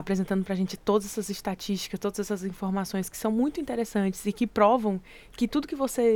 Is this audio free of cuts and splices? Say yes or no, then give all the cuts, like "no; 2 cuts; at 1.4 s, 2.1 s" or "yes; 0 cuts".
yes; 0 cuts